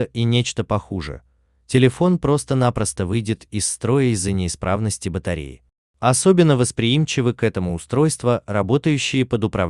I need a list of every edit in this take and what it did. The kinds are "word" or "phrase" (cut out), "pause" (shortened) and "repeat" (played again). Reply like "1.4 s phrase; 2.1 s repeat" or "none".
none